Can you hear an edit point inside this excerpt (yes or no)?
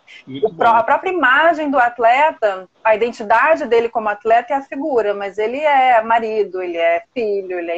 yes